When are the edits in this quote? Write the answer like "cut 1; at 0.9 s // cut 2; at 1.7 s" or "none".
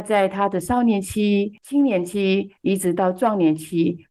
cut 1; at 2.6 s